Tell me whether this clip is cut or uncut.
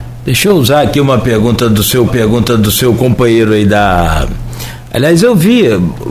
cut